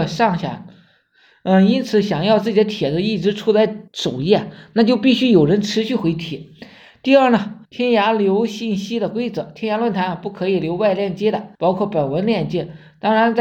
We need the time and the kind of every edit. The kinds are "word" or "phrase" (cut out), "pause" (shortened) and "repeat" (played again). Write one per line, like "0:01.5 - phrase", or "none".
0:03.9 - pause
0:07.6 - pause
0:11.5 - pause